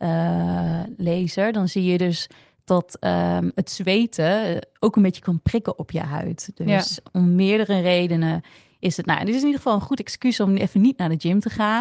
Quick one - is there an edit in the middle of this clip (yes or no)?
no